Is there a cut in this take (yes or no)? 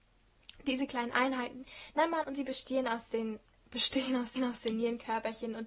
yes